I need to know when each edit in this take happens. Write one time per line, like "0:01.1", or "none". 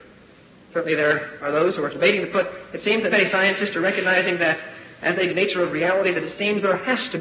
0:01.9
0:02.3
0:03.1
0:05.3